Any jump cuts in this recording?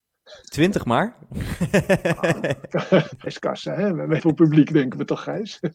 yes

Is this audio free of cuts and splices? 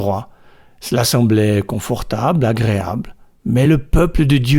yes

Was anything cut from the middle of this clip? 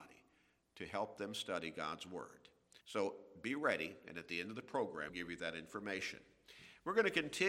yes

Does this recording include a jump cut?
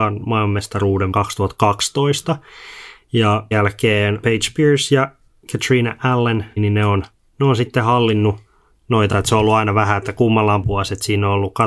yes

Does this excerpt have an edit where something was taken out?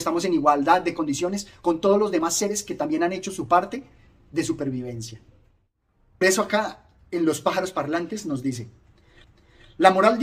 yes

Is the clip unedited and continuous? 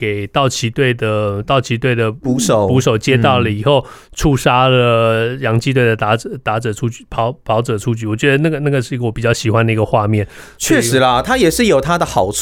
yes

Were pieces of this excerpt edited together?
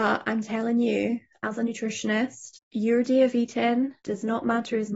yes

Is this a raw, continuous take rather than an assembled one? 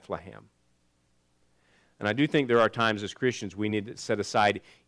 yes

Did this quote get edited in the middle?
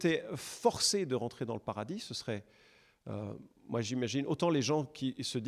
no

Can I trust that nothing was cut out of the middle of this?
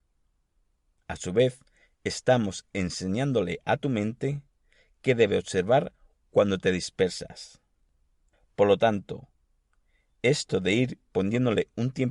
yes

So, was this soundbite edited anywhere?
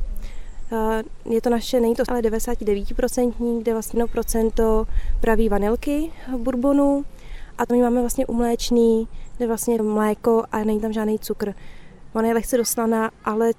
yes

